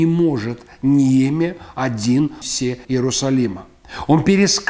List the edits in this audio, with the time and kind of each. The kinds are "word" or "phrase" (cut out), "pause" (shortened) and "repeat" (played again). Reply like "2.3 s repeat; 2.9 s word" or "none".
2.4 s word; 2.8 s word